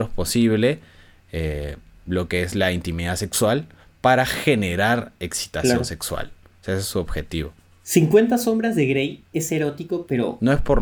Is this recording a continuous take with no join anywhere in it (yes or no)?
yes